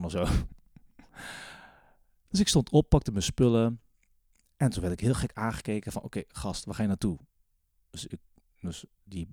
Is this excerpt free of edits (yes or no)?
yes